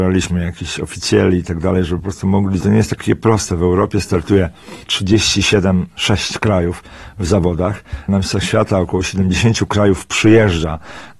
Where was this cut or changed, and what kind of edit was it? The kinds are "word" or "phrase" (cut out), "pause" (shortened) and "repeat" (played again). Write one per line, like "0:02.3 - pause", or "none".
0:02.6 - phrase
0:04.8 - pause